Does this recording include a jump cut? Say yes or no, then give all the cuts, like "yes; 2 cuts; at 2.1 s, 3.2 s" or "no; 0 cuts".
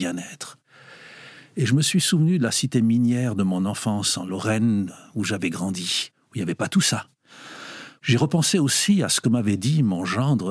no; 0 cuts